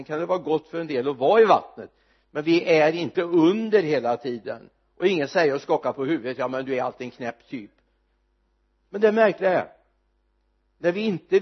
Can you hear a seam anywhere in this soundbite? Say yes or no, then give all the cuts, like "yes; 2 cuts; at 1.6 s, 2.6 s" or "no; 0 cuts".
no; 0 cuts